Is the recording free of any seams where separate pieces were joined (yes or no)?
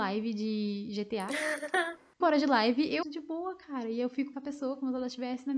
no